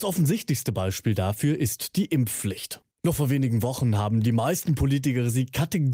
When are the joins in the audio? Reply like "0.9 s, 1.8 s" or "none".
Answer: 2.9 s